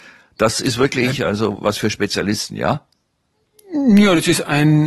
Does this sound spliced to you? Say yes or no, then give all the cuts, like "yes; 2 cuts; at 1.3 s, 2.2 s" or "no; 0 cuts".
no; 0 cuts